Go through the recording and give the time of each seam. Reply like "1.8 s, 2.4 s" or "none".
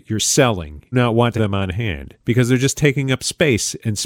0.9 s, 1.4 s, 2.2 s